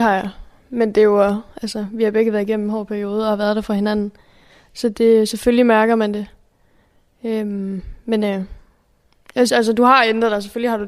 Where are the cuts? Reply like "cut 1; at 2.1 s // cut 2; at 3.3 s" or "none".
cut 1; at 9.5 s